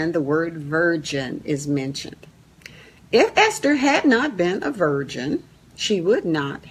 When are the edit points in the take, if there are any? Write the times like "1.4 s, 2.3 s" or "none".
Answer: none